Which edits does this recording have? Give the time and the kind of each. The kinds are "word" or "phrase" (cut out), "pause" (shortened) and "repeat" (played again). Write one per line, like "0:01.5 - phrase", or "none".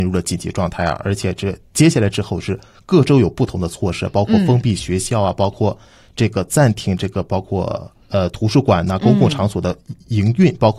0:08.0 - pause